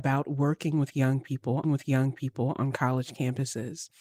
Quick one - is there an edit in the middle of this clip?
yes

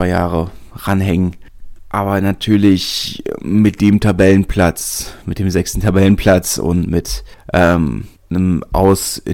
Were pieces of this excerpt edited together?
no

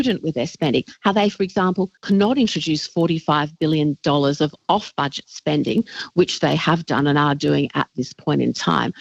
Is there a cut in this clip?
yes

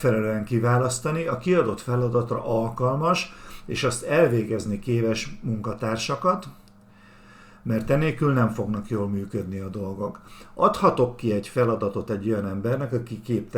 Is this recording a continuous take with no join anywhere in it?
yes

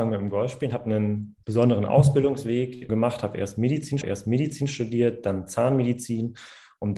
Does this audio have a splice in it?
yes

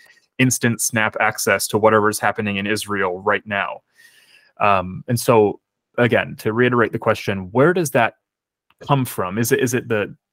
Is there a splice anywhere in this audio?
no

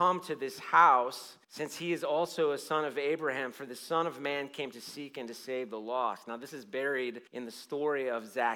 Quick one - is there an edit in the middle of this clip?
yes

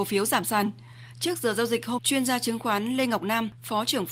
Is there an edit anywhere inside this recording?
yes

